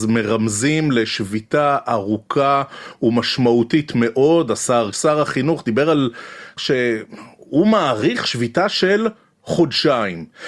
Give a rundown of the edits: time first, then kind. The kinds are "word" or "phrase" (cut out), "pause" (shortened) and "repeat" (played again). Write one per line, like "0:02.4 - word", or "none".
0:04.9 - word
0:06.6 - word

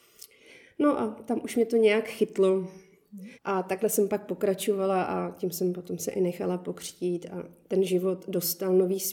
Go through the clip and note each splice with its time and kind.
0:03.3 - pause

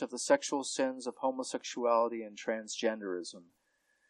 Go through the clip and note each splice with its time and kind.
none

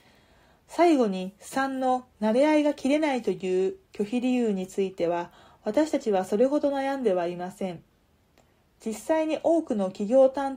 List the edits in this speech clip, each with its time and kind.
none

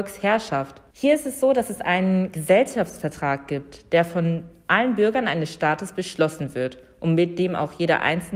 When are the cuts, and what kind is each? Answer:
0:00.9 - pause

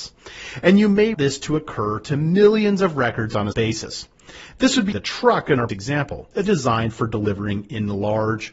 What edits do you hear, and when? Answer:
0:01.1 - word
0:03.5 - word
0:04.9 - phrase
0:05.7 - word
0:06.4 - word

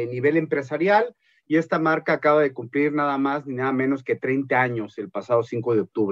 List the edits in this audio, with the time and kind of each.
none

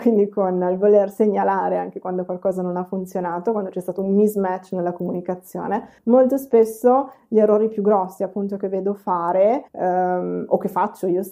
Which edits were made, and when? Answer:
0:06.0 - pause
0:09.7 - pause

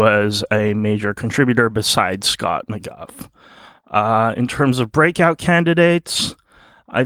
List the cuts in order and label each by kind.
none

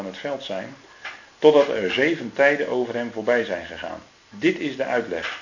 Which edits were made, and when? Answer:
none

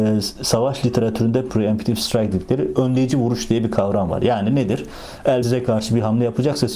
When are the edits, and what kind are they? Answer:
0:01.5 - phrase
0:05.4 - word

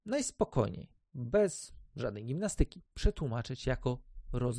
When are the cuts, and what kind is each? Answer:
none

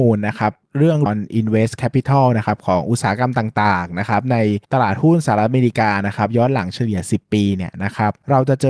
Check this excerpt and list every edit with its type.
0:01.1 - word

